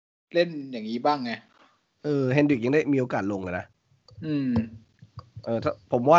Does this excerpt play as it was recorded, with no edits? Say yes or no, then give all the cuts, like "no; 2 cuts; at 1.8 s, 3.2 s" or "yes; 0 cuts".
yes; 0 cuts